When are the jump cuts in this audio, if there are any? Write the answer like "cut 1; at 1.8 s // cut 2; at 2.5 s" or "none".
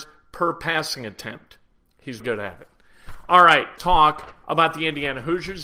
cut 1; at 2.2 s // cut 2; at 3.8 s